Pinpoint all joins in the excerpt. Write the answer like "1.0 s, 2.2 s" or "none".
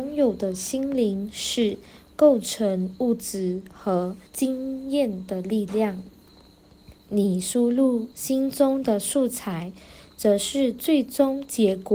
4.3 s, 8.1 s